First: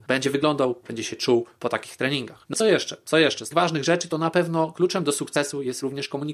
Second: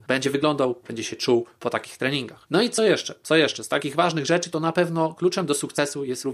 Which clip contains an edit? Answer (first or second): first